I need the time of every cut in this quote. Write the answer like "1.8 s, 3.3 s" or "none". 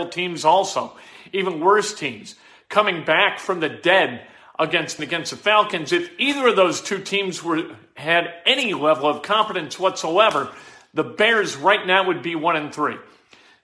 5.0 s